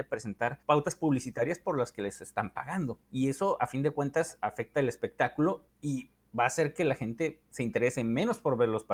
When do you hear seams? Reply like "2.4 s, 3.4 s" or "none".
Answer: 3.0 s, 5.7 s